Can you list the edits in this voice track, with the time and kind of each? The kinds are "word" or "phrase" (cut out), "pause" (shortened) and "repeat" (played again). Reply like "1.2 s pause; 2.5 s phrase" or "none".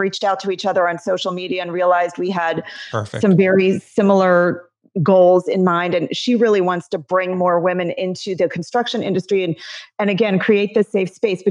none